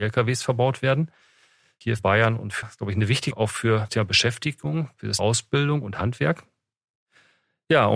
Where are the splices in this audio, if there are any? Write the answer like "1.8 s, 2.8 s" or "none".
2.0 s, 2.6 s, 3.3 s, 3.9 s, 5.2 s